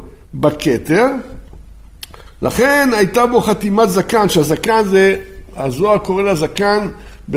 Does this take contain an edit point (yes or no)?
no